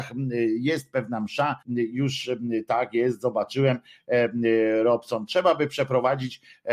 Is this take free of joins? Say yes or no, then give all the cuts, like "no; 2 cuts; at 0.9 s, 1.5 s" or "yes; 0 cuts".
no; 1 cut; at 1.6 s